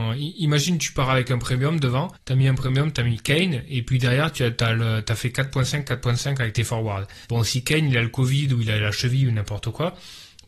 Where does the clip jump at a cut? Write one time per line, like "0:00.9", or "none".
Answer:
0:02.2
0:07.2

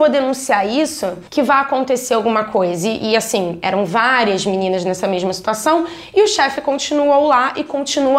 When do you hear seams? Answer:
0:01.3

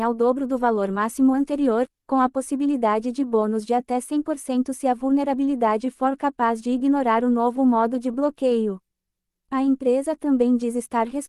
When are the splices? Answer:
none

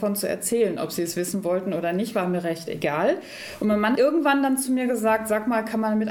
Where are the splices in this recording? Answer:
0:04.0

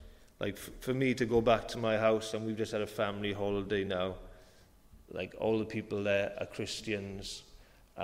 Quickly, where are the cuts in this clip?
none

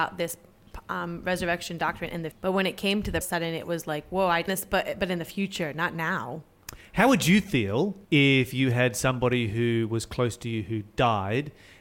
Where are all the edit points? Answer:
0:02.3
0:03.2
0:04.5
0:08.0

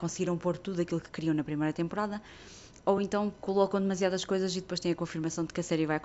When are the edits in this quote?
none

